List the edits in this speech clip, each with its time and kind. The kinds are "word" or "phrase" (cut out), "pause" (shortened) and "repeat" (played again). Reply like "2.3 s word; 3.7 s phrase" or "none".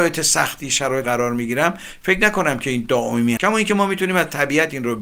1.0 s word; 3.4 s word